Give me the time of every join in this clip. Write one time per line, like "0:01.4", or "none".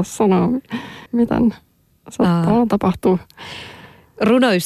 0:01.1